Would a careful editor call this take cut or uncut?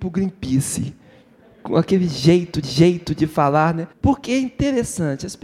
cut